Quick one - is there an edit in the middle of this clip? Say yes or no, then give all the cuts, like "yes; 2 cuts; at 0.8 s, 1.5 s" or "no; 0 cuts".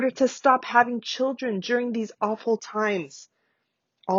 no; 0 cuts